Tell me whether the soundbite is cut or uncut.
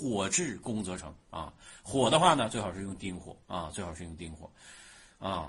cut